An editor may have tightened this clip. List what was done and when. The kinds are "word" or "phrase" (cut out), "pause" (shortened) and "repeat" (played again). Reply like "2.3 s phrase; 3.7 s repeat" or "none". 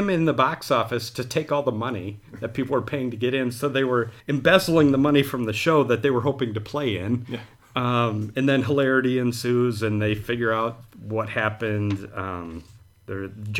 4.2 s pause